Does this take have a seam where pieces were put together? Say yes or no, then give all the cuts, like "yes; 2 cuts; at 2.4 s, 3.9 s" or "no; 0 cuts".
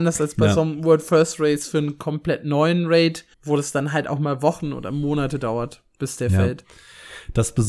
yes; 1 cut; at 3.3 s